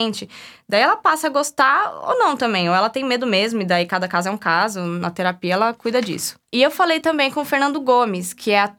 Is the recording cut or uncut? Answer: uncut